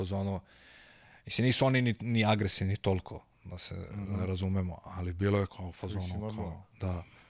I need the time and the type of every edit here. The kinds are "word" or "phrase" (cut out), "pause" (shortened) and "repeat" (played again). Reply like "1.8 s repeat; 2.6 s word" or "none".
5.5 s word